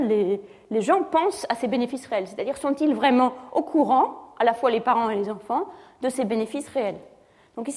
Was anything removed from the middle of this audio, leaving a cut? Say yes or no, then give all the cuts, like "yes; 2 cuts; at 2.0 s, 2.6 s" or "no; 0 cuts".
no; 0 cuts